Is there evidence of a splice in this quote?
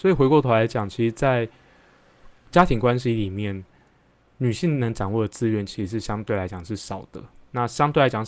no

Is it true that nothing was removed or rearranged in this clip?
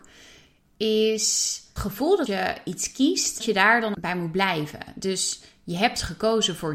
no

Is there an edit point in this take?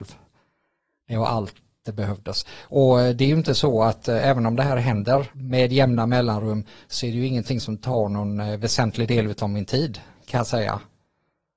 no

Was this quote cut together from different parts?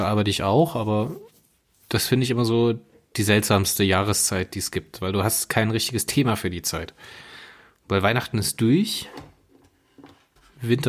no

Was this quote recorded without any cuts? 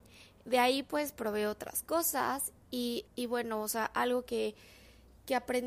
no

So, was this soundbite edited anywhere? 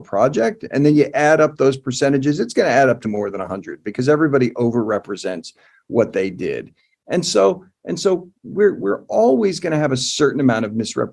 yes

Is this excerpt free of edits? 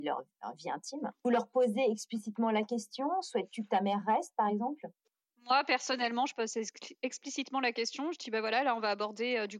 yes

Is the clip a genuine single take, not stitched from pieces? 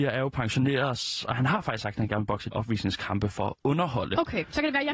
no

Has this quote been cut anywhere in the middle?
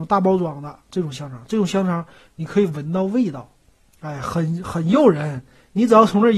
no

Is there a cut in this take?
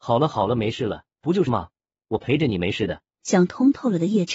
yes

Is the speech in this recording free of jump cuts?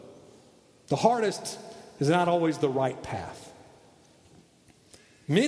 yes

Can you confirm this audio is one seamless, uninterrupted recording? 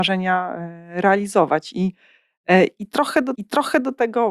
no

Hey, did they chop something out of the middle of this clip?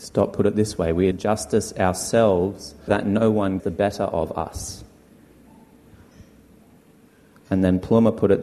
yes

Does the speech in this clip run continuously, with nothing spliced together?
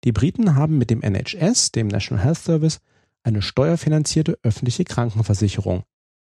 yes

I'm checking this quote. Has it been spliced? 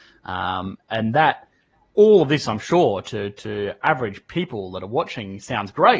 no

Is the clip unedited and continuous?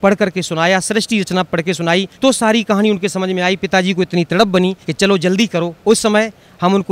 no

